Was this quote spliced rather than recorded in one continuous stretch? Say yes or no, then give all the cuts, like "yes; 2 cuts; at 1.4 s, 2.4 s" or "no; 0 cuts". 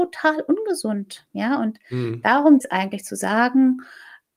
yes; 1 cut; at 2.6 s